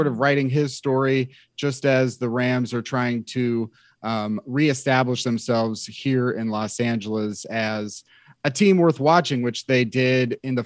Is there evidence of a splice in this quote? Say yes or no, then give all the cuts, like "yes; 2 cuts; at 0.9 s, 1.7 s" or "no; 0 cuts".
no; 0 cuts